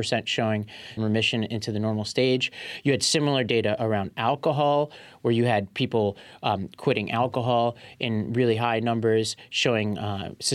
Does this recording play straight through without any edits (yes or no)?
no